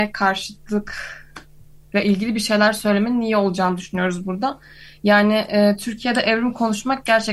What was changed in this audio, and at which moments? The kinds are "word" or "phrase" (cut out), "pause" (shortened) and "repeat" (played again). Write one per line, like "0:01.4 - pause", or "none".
none